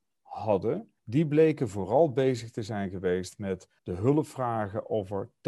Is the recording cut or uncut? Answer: cut